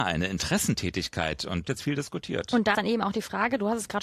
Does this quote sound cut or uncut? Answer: cut